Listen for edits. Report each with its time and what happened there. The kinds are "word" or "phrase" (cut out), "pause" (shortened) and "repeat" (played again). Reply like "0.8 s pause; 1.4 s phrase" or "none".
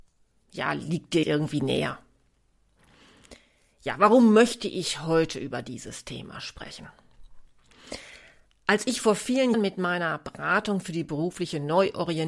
1.2 s word; 9.5 s word